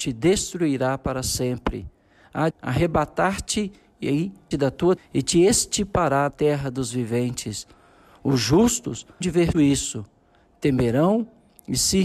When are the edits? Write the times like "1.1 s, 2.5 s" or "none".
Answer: 2.5 s, 4.5 s, 5.0 s, 6.3 s, 9.2 s, 9.5 s